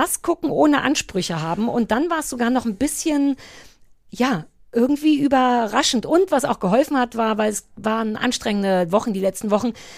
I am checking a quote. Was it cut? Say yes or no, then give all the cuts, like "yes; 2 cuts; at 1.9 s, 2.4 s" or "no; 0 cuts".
no; 0 cuts